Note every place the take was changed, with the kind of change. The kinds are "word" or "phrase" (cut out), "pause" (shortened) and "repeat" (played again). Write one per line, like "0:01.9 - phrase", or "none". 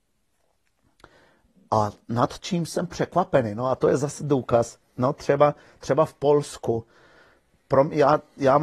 none